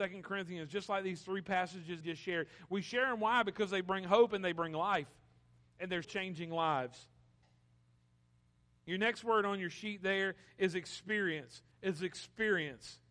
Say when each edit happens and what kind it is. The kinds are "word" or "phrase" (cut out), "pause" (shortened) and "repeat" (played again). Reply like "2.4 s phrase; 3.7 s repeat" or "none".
2.0 s phrase; 6.0 s word; 11.7 s pause